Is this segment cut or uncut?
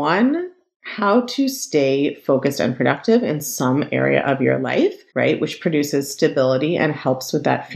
cut